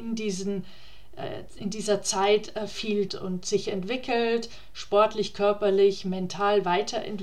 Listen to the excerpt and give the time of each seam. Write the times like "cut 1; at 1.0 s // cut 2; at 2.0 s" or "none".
cut 1; at 3.1 s